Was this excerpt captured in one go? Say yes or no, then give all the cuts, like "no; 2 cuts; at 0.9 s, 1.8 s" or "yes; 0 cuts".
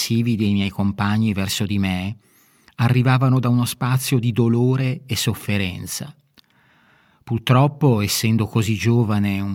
yes; 0 cuts